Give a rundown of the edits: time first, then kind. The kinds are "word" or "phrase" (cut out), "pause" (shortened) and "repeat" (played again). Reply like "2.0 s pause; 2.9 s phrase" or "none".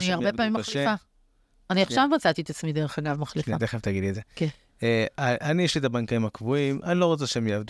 none